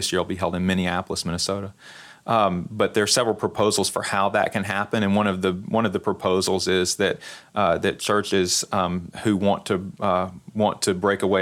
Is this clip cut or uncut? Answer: uncut